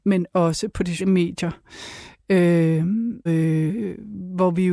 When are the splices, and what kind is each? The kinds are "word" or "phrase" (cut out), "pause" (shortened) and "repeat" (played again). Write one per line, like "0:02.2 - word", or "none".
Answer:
0:01.0 - word
0:03.3 - word